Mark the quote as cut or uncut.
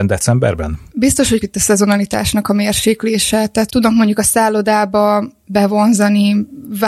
cut